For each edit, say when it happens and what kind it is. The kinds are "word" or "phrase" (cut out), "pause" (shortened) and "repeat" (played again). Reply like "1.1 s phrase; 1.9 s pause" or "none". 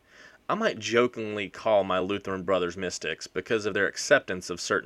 none